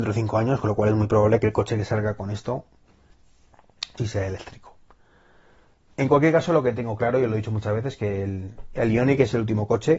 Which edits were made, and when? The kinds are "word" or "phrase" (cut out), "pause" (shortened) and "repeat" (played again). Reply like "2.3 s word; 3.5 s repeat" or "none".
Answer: 4.0 s word